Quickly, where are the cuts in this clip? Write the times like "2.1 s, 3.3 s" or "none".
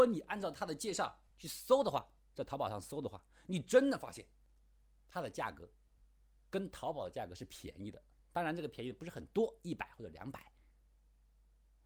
1.3 s